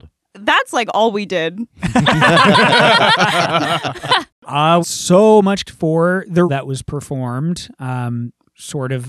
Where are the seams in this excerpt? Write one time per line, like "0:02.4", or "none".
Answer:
0:04.8
0:05.6
0:06.5